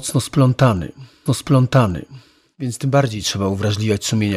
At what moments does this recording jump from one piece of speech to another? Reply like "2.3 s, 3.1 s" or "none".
1.3 s